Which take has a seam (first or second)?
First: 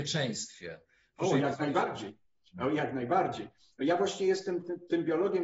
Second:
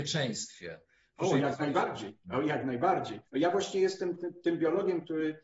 second